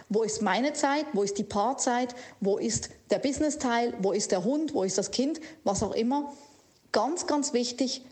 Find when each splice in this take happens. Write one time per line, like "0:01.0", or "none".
none